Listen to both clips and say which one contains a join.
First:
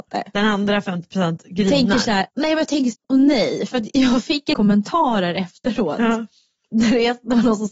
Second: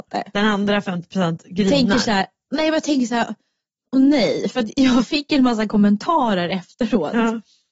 first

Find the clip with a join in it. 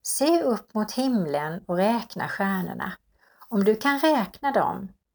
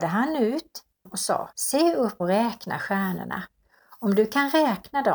second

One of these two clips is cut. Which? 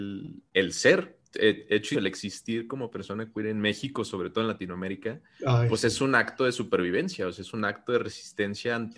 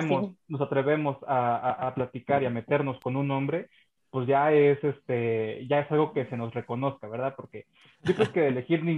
first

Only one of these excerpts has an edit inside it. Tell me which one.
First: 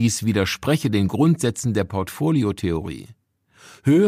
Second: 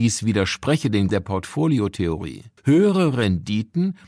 second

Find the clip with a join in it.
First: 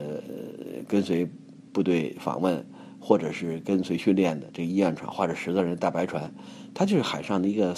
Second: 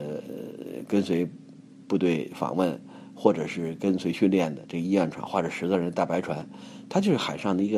first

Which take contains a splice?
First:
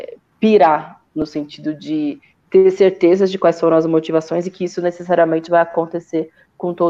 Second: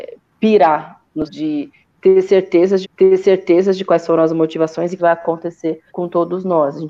second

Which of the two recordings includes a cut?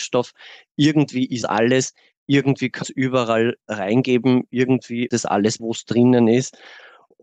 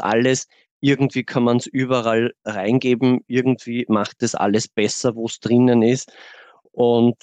first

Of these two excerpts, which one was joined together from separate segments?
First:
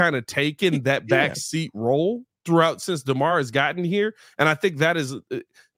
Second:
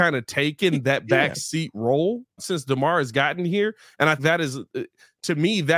second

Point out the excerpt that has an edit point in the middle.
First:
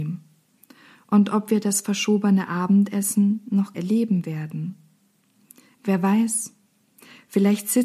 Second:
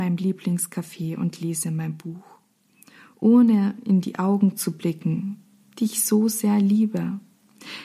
first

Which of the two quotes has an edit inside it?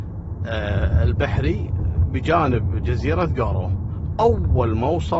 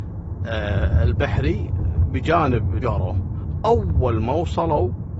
second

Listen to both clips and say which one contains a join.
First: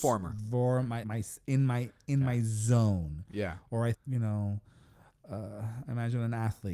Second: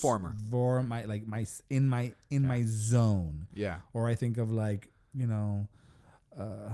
first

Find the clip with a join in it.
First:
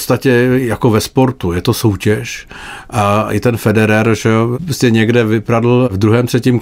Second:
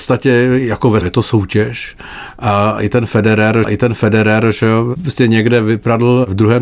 second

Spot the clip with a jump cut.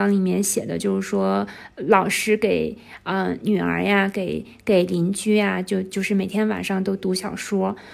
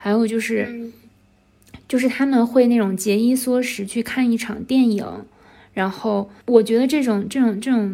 second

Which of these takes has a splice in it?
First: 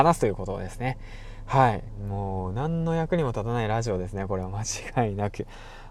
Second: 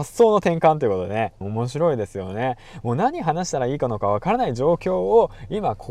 second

